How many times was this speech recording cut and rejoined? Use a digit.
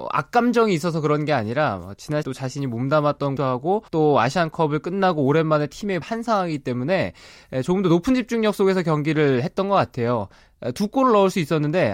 4